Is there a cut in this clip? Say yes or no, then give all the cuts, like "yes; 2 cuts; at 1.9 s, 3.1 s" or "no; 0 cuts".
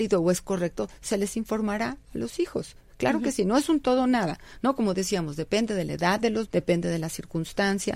yes; 1 cut; at 6.5 s